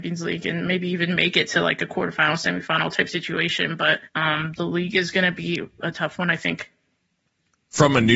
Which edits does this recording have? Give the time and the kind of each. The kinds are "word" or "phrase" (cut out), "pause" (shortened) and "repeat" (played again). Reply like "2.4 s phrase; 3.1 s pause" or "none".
4.1 s pause